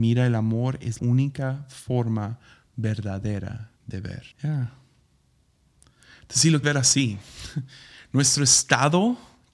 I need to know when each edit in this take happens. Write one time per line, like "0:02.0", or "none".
0:01.0
0:03.8
0:04.3
0:06.6